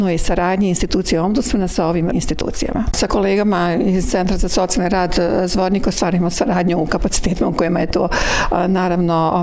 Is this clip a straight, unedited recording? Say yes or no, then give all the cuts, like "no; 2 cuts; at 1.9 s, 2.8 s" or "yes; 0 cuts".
no; 1 cut; at 2.1 s